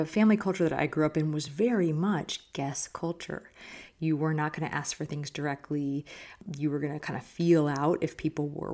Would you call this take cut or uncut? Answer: uncut